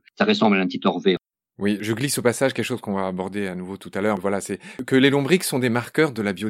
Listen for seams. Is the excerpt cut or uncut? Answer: uncut